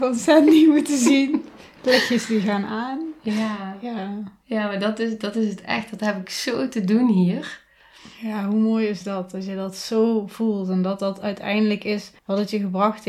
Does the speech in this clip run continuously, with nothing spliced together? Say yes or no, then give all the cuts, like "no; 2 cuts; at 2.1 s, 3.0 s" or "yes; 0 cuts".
no; 1 cut; at 12.2 s